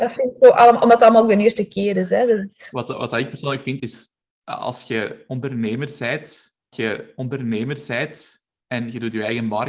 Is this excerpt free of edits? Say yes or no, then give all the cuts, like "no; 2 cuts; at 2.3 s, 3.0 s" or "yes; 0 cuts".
no; 3 cuts; at 3.8 s, 4.2 s, 6.7 s